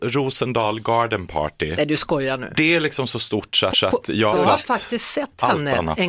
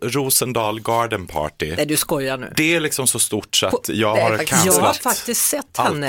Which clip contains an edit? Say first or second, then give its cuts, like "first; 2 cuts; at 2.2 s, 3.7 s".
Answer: first; 2 cuts; at 3.7 s, 4.3 s